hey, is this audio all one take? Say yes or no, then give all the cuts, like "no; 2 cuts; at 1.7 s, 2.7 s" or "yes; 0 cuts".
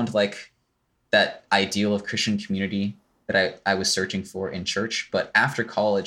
yes; 0 cuts